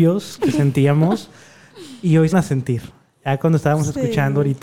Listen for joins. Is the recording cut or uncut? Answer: cut